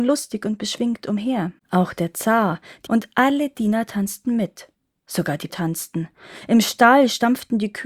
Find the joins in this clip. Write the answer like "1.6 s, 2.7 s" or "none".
1.6 s, 2.9 s, 4.8 s, 5.5 s

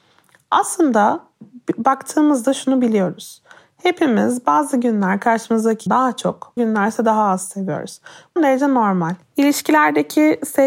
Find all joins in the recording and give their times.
5.9 s, 6.6 s, 8.4 s

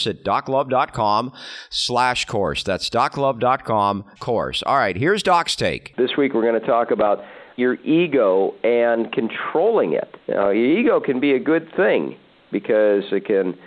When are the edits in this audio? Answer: 4.2 s, 7.6 s, 10.2 s

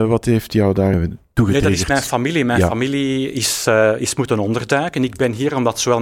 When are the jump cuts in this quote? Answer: 0.9 s

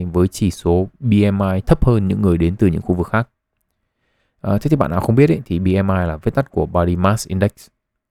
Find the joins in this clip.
none

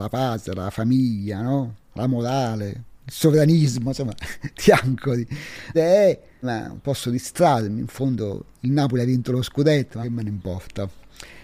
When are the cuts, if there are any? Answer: 5.7 s, 6.4 s, 10.0 s

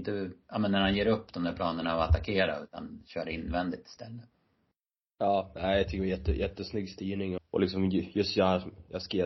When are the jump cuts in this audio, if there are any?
7.4 s

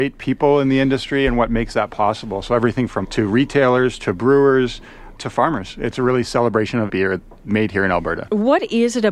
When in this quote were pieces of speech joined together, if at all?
3.0 s, 5.2 s, 6.9 s

